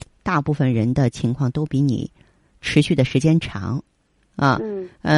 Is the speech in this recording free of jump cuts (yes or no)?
yes